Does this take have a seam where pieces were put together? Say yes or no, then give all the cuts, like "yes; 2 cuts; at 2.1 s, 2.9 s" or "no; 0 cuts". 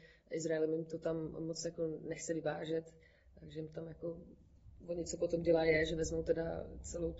no; 0 cuts